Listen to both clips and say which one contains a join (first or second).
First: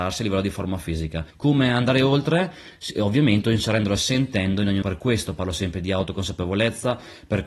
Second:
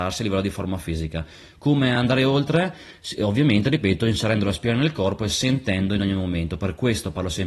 first